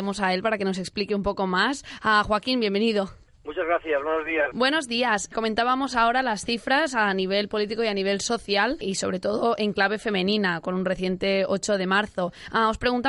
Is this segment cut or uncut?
uncut